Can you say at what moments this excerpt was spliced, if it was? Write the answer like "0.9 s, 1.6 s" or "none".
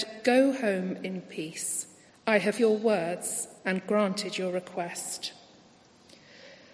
2.1 s, 2.6 s, 3.6 s